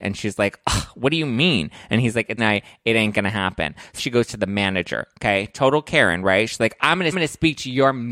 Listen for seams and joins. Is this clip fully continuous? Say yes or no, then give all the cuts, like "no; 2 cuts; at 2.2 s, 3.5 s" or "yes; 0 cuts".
no; 3 cuts; at 2.4 s, 4.0 s, 7.1 s